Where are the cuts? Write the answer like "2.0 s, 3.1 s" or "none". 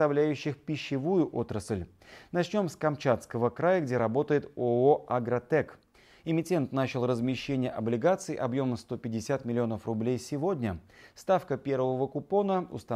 none